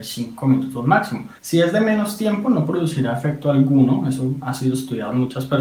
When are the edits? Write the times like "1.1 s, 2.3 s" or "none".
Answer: 1.4 s